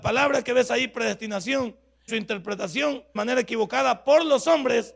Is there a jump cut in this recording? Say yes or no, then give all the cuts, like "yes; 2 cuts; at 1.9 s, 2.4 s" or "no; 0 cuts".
yes; 2 cuts; at 2.1 s, 3.2 s